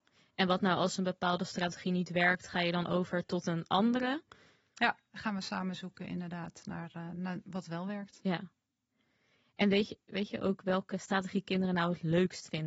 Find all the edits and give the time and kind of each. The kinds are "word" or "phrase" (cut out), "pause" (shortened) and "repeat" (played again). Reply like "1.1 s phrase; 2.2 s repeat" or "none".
none